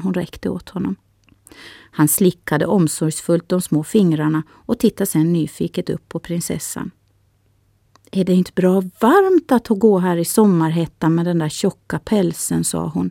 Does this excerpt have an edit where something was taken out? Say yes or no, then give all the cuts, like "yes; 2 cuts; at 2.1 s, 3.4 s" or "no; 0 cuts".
no; 0 cuts